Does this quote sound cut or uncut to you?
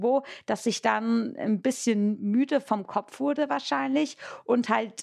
uncut